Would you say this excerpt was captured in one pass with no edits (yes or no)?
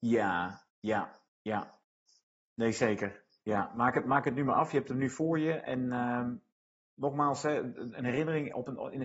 yes